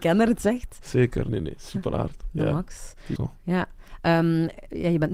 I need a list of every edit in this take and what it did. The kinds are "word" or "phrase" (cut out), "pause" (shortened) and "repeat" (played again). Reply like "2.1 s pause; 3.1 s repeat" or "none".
1.3 s word; 3.2 s word